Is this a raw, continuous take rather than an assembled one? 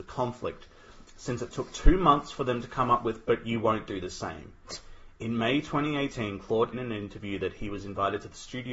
no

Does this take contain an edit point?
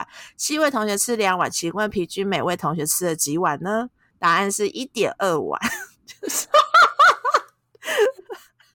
no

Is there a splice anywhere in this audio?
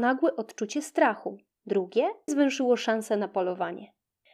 yes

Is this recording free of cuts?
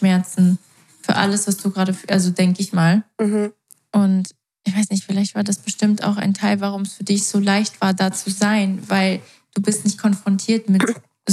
yes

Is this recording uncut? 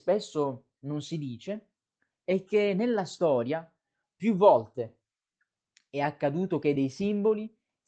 yes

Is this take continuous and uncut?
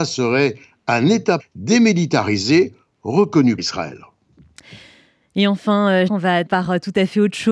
no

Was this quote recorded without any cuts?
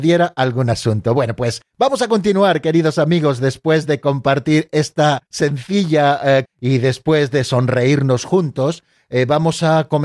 no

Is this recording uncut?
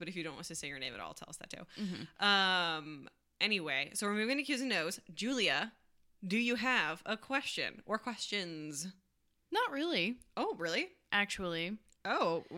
yes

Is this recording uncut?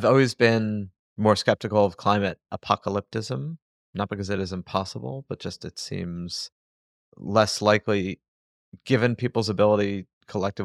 yes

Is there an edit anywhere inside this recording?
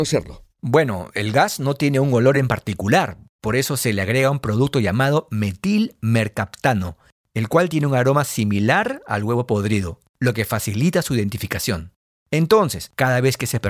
no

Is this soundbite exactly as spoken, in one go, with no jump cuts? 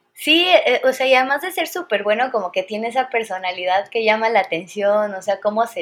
yes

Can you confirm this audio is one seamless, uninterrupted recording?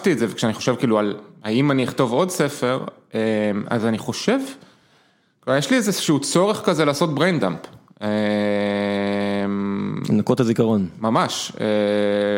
yes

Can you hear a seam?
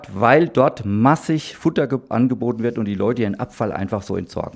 no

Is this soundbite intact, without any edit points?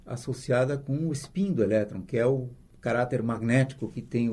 yes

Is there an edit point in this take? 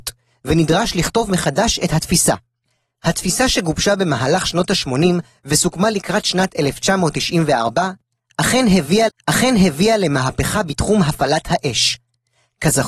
yes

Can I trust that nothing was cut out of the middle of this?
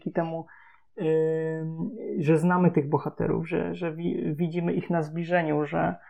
yes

